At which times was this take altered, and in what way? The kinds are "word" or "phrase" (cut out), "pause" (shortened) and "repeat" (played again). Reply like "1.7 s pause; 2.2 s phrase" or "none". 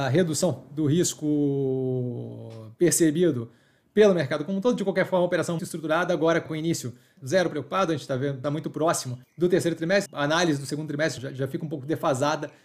5.6 s word; 6.5 s word; 7.2 s phrase; 8.4 s phrase; 9.2 s pause; 10.1 s word; 11.2 s word